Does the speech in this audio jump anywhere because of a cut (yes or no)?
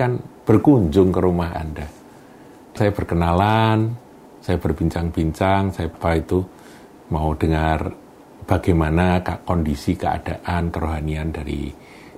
yes